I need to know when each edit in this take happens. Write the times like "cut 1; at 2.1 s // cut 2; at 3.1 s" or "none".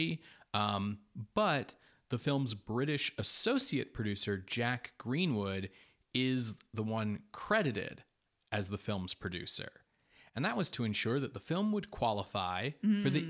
none